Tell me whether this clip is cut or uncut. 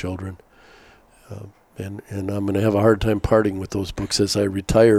uncut